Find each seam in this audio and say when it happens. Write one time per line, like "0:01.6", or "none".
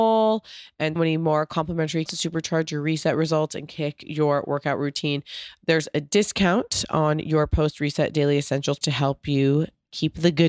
0:01.0
0:02.1
0:08.8